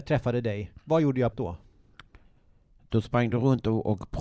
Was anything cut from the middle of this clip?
yes; 1 cut; at 1.3 s

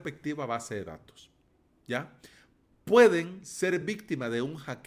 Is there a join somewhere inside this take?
no; 0 cuts

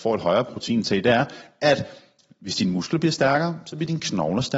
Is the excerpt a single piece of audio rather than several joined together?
yes; 0 cuts

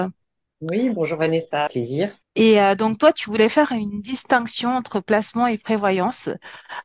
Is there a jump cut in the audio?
yes; 2 cuts; at 1.7 s, 2.2 s

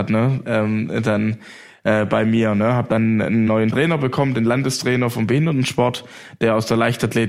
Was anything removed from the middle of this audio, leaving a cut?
no; 0 cuts

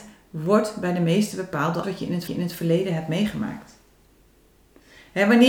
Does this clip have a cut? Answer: yes; 3 cuts; at 1.3 s, 1.8 s, 2.3 s

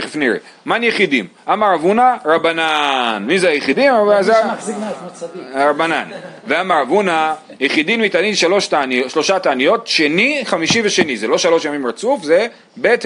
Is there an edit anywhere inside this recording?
no; 0 cuts

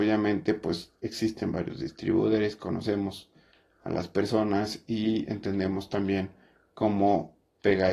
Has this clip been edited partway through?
no; 0 cuts

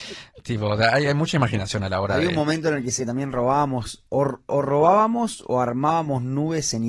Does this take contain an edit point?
yes; 1 cut; at 3.0 s

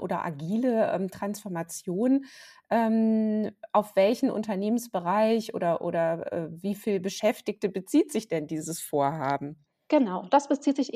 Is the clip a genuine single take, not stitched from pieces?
yes; 0 cuts

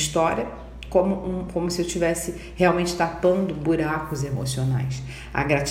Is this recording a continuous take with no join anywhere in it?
yes; 0 cuts

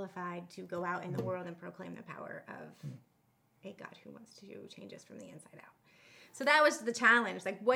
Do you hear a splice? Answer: no; 0 cuts

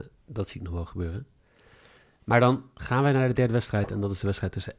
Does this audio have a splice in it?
no; 0 cuts

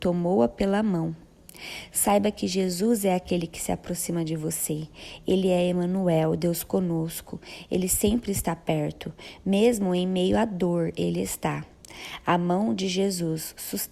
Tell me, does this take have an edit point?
no; 0 cuts

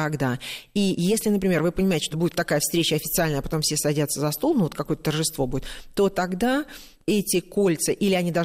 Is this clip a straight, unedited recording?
no; 1 cut; at 2.1 s

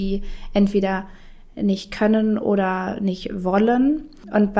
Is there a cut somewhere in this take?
no; 0 cuts

